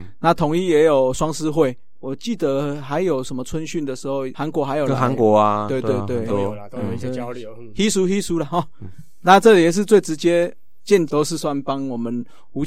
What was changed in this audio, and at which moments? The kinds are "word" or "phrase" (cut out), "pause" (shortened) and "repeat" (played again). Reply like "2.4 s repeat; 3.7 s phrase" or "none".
11.1 s phrase